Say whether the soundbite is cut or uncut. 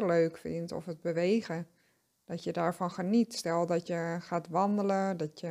uncut